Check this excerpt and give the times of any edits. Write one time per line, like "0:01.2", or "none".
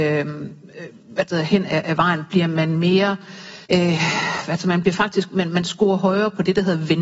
0:03.7